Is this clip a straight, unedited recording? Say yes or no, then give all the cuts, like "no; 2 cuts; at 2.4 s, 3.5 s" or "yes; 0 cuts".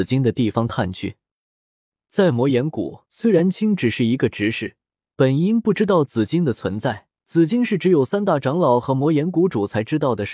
no; 3 cuts; at 3.1 s, 5.0 s, 7.1 s